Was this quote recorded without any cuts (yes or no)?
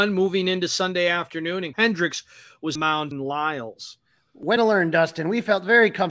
no